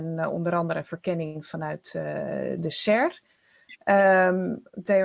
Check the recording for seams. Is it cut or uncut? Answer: uncut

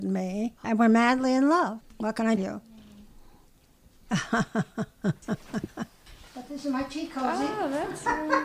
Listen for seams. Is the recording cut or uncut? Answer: cut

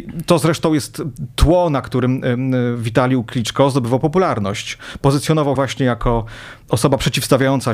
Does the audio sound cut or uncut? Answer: cut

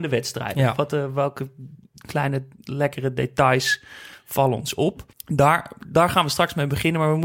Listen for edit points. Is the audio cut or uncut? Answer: cut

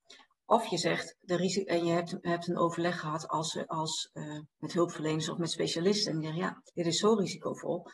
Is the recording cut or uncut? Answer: cut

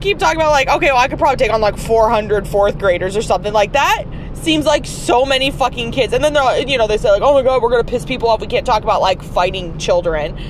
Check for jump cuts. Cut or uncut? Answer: uncut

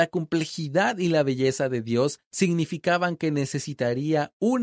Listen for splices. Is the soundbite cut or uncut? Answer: uncut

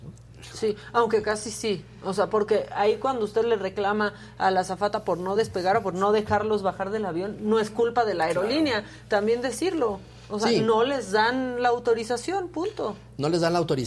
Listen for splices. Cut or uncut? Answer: uncut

